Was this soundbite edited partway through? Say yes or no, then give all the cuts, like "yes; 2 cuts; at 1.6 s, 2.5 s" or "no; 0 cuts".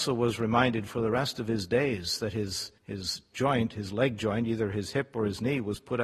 yes; 1 cut; at 2.8 s